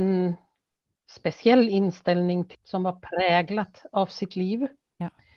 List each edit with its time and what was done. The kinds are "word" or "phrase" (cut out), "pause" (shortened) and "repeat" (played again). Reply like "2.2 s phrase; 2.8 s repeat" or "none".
2.5 s word